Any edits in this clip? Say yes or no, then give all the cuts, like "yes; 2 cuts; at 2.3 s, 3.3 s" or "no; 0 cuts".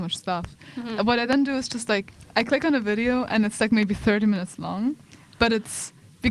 no; 0 cuts